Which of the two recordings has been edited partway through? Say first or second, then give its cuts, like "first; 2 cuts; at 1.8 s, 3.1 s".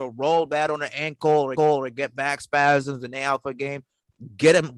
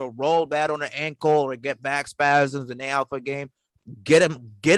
first; 1 cut; at 1.6 s